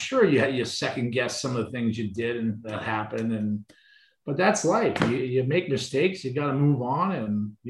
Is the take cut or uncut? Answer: uncut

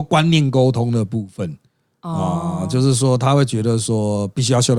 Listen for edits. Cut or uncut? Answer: uncut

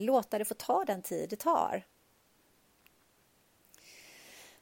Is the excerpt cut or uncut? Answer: uncut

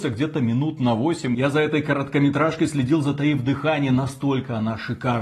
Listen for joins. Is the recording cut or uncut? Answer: uncut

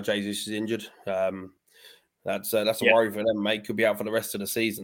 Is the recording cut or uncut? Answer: uncut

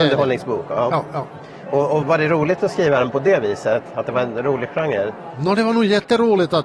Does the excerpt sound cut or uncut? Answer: cut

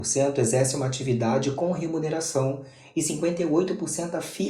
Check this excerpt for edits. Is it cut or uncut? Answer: uncut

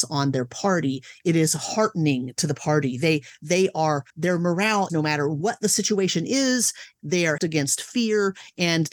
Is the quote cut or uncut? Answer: cut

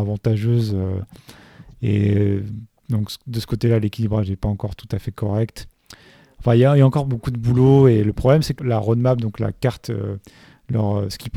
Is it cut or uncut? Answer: cut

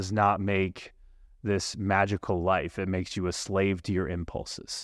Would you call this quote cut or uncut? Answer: uncut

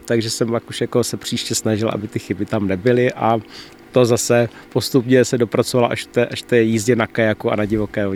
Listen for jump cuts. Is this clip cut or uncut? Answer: uncut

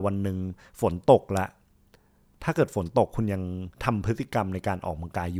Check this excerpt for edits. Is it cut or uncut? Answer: cut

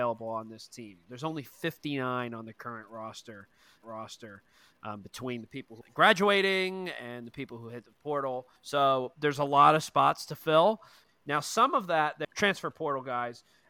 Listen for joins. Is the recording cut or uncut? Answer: cut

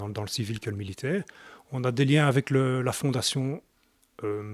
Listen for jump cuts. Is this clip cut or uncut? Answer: uncut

